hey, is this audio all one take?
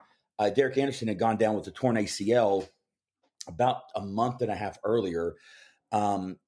yes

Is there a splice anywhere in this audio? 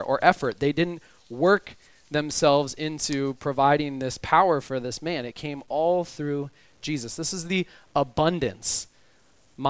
no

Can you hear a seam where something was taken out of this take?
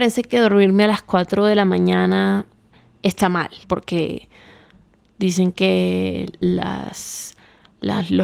yes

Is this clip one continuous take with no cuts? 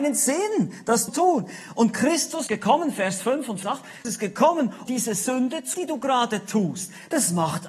no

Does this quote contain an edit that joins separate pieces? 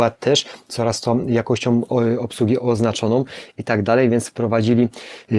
yes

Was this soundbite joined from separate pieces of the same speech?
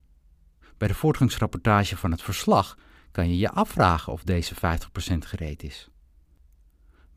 no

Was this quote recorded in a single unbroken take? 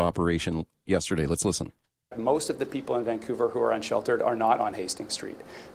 yes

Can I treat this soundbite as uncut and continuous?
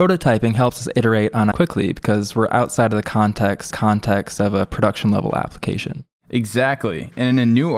no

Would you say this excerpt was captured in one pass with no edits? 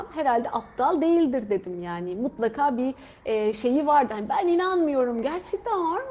yes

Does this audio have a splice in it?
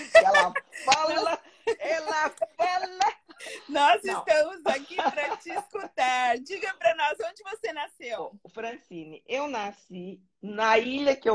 no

